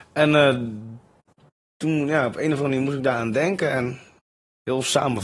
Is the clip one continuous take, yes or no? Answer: yes